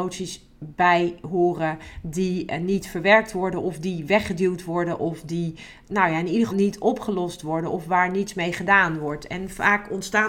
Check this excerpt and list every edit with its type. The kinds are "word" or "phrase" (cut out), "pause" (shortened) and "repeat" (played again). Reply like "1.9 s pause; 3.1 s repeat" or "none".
6.5 s word